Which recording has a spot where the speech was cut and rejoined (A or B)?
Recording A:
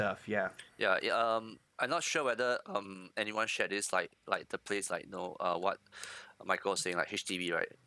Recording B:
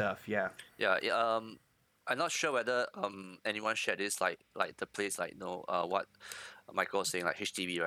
A